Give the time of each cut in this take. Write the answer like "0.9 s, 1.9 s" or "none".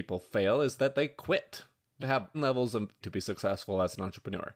2.0 s, 2.3 s, 3.0 s